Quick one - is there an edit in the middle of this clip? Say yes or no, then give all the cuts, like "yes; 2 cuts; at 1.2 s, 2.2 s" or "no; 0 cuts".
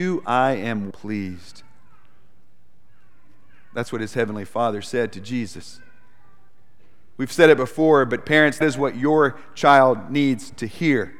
yes; 2 cuts; at 0.9 s, 8.6 s